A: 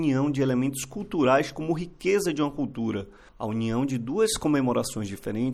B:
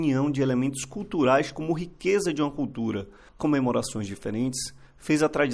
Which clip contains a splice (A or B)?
B